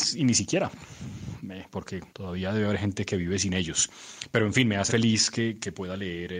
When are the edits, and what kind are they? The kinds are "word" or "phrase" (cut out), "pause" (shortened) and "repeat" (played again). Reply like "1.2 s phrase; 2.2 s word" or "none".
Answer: 2.1 s pause; 4.9 s word

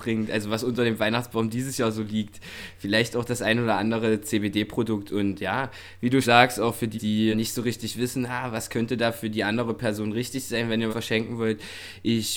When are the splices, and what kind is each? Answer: 6.2 s word; 6.9 s word; 7.3 s word; 10.9 s word

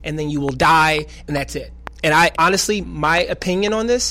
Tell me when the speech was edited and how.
1.3 s phrase; 1.9 s pause; 2.3 s word; 2.8 s word

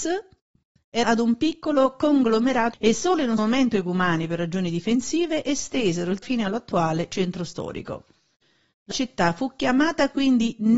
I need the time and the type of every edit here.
1.0 s word; 2.7 s word; 3.4 s word; 6.2 s word; 8.9 s word

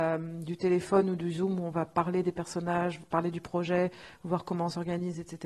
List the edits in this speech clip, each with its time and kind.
none

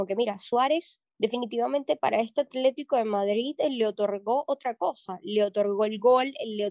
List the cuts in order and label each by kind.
none

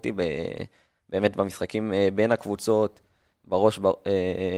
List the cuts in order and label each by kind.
none

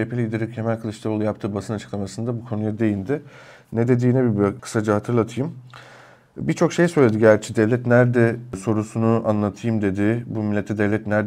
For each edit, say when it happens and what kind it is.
none

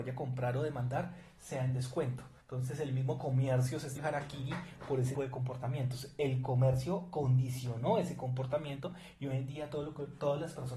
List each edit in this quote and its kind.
2.4 s pause; 4.0 s word; 5.1 s word

